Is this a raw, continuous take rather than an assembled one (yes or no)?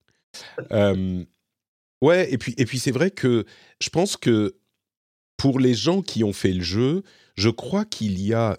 yes